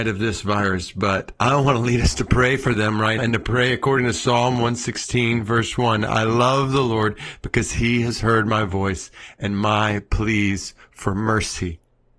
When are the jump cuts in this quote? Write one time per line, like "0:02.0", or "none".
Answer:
0:01.4
0:03.2